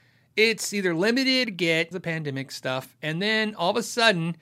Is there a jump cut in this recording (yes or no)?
yes